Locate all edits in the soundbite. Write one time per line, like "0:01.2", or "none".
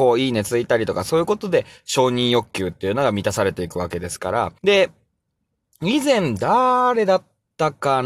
0:04.6